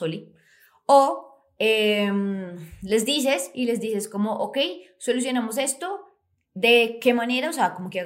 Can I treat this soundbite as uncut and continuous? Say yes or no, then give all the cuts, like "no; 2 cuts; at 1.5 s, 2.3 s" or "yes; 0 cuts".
yes; 0 cuts